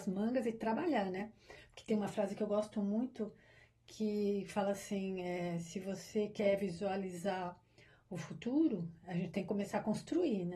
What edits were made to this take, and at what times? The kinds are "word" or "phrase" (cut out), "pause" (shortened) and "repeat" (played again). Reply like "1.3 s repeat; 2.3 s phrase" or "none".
none